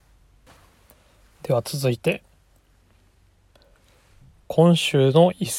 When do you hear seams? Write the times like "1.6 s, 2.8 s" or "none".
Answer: none